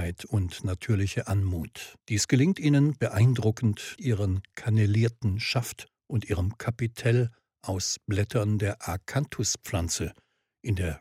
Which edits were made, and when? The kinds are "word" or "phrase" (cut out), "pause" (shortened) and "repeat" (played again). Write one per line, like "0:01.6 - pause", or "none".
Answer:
0:02.0 - pause
0:04.0 - word